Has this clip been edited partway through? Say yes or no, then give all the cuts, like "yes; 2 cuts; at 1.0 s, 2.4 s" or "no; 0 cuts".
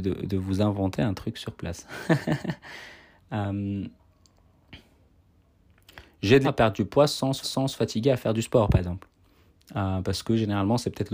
yes; 2 cuts; at 6.4 s, 7.4 s